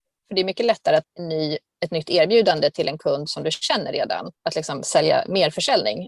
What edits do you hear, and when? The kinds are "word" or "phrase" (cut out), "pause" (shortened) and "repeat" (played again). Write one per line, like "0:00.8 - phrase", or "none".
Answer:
0:01.0 - word
0:04.3 - pause

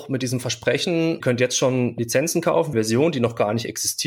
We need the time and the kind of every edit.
0:01.2 - phrase
0:02.7 - phrase

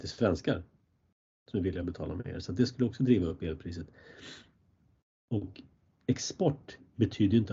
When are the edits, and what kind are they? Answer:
none

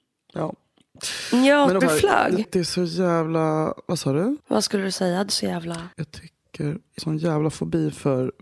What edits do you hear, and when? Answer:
0:01.8 - word
0:02.4 - word
0:04.4 - pause
0:05.3 - word
0:05.9 - pause
0:07.0 - word

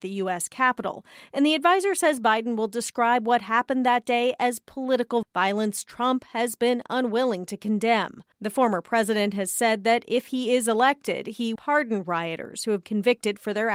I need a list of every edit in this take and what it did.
0:05.2 - word
0:08.3 - pause
0:11.6 - word
0:12.8 - word

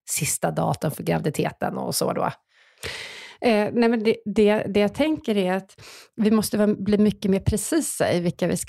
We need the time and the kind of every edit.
none

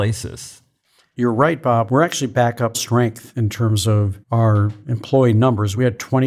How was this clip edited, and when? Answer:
0:02.7 - phrase
0:04.2 - pause

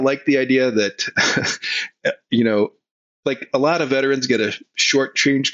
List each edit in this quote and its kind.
none

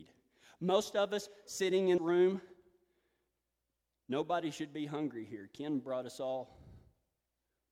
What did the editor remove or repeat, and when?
0:02.0 - word

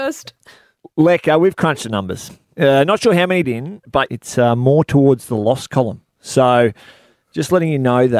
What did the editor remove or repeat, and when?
0:03.4 - phrase
0:04.1 - phrase

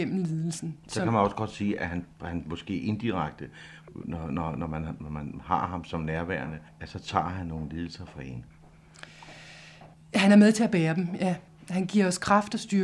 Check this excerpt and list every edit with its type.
0:06.7 - pause
0:09.9 - pause
0:11.5 - pause

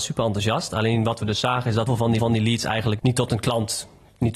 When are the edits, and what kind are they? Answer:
0:01.9 - word
0:02.2 - repeat
0:03.0 - word

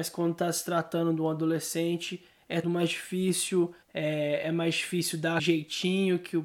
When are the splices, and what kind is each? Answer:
0:02.6 - word
0:03.8 - pause
0:05.4 - word

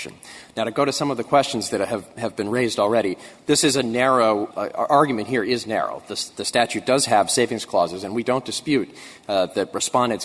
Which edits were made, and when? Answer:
0:04.5 - word

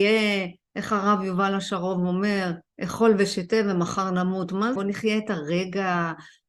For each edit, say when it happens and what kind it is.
0:04.8 - word

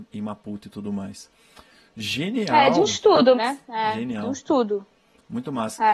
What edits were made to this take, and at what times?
0:03.3 - word

